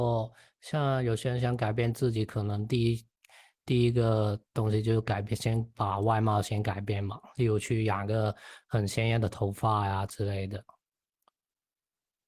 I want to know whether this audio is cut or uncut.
uncut